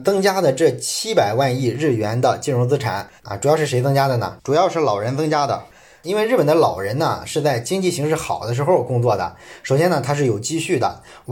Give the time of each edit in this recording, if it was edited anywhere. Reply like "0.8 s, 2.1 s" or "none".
3.2 s

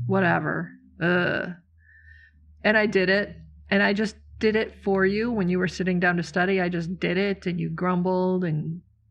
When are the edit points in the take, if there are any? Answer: none

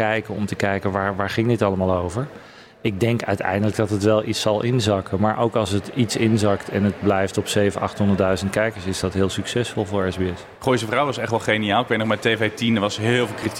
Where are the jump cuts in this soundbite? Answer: none

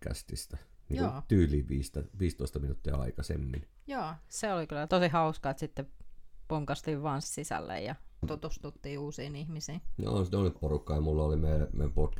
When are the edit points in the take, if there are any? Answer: 4.9 s, 7.2 s, 8.2 s, 10.6 s

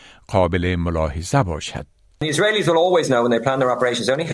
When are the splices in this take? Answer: none

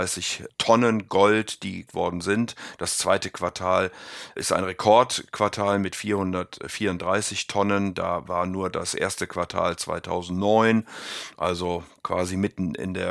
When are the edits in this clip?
1.9 s

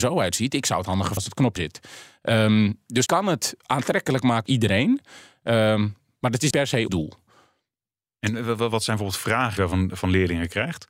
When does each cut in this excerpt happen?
1.2 s, 1.6 s, 3.1 s, 4.5 s, 6.5 s, 6.9 s, 9.6 s

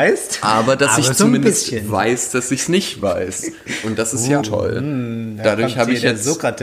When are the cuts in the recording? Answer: 4.4 s

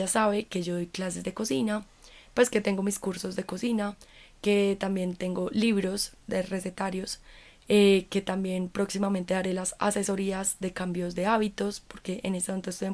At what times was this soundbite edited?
none

